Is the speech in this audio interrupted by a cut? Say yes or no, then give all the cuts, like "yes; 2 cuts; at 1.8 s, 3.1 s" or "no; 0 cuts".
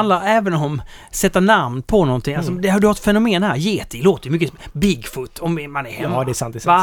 no; 0 cuts